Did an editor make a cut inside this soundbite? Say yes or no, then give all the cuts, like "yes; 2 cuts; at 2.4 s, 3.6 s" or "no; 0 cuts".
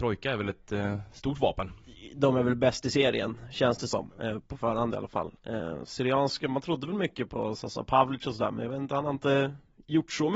no; 0 cuts